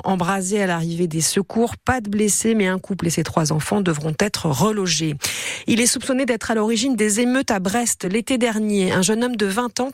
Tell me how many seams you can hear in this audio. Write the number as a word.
zero